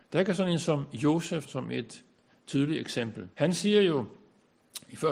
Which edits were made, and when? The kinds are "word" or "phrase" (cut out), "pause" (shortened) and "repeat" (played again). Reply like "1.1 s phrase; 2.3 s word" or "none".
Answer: 1.4 s word; 3.3 s pause